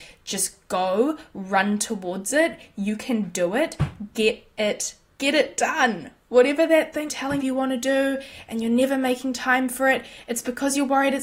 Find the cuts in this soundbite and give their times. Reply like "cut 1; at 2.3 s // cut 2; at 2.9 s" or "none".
cut 1; at 5.1 s // cut 2; at 7.1 s // cut 3; at 7.4 s